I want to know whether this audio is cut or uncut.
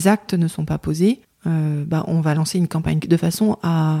cut